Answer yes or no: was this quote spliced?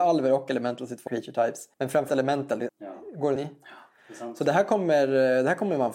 yes